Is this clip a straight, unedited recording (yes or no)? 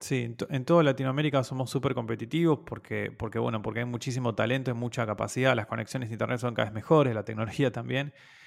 yes